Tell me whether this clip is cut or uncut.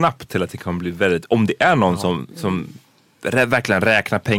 cut